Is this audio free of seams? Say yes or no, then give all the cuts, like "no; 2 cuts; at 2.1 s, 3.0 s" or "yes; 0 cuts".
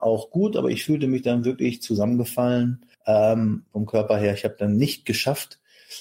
no; 1 cut; at 2.9 s